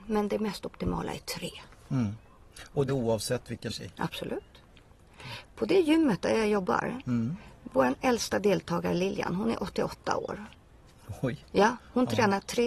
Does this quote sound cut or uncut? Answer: cut